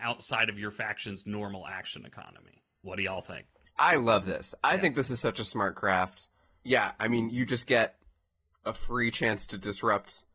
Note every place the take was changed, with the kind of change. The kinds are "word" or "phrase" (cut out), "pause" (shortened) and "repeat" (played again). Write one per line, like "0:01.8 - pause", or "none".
none